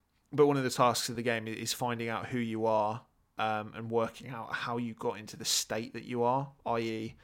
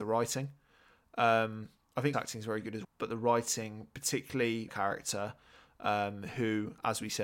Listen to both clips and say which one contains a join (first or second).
second